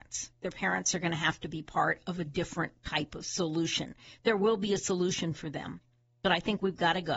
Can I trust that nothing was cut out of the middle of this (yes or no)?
yes